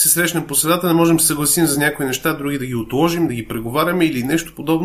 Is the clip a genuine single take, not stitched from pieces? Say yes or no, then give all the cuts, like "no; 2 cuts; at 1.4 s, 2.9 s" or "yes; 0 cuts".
yes; 0 cuts